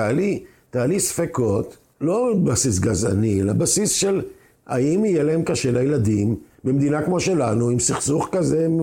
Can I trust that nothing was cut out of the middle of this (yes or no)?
yes